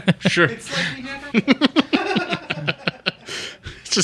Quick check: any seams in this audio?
yes; 1 cut; at 1.3 s

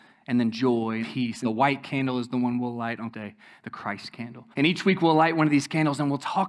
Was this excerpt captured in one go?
no; 4 cuts; at 1.0 s, 1.4 s, 3.1 s, 4.5 s

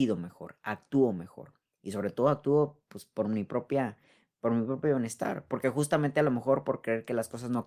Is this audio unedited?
yes; 0 cuts

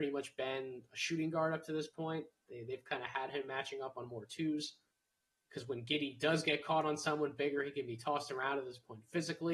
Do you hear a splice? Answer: no; 0 cuts

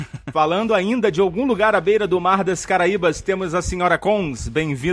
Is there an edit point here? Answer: no; 0 cuts

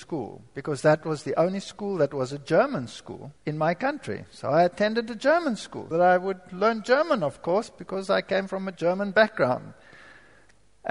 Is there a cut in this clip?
yes; 2 cuts; at 3.4 s, 5.9 s

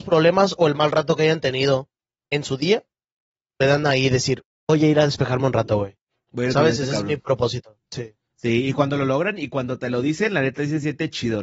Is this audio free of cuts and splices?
yes; 0 cuts

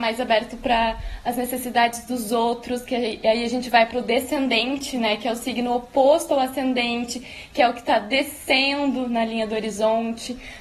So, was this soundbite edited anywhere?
no; 0 cuts

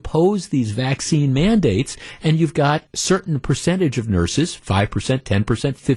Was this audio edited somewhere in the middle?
yes; 1 cut; at 2.9 s

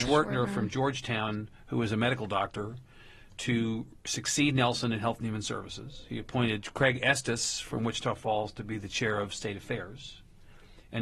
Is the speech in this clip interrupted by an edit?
no; 0 cuts

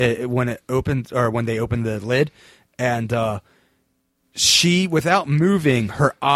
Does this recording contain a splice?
no; 0 cuts

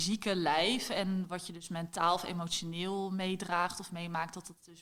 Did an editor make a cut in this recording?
no; 0 cuts

